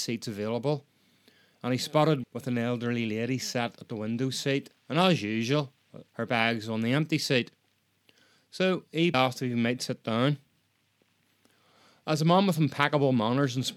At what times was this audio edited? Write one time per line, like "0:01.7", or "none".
0:02.2
0:04.8
0:06.1
0:09.1